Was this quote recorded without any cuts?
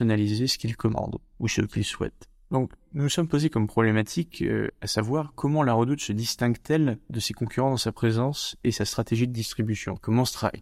yes; 0 cuts

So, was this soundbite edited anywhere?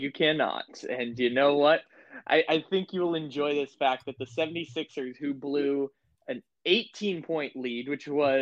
no; 0 cuts

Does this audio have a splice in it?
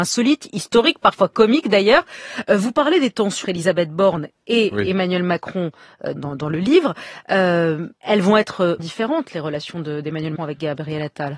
yes; 5 cuts; at 3.4 s, 6.2 s, 8.0 s, 8.8 s, 10.4 s

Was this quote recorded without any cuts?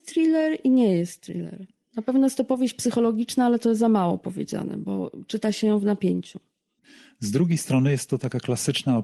yes; 0 cuts

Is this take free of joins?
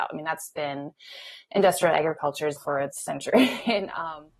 no; 2 cuts; at 2.6 s, 2.9 s

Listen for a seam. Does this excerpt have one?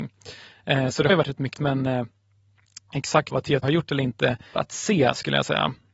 yes; 5 cuts; at 1.1 s, 1.5 s, 3.3 s, 3.6 s, 4.5 s

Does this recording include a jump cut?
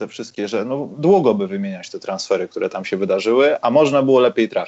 no; 0 cuts

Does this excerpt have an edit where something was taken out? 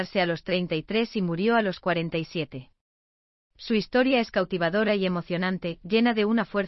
no; 0 cuts

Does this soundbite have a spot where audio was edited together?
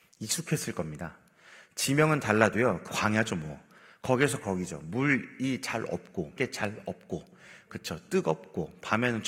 yes; 2 cuts; at 2.9 s, 6.4 s

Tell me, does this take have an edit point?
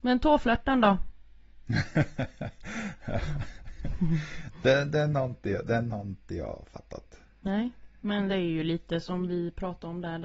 no; 0 cuts

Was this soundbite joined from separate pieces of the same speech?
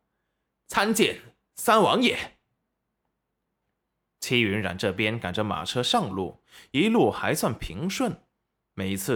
no; 0 cuts

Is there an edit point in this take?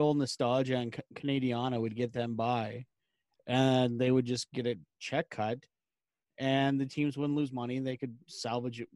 no; 0 cuts

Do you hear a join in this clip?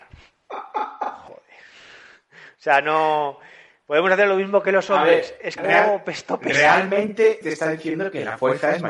yes; 2 cuts; at 5.6 s, 7.4 s

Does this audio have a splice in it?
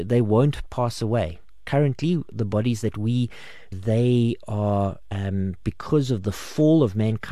yes; 1 cut; at 3.7 s

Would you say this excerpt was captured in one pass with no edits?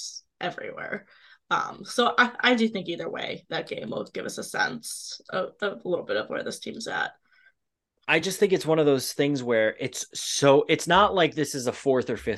yes; 0 cuts

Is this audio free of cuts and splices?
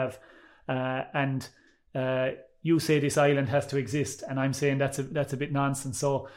yes; 0 cuts

